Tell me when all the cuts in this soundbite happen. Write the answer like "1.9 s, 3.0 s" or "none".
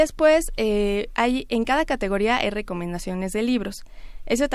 none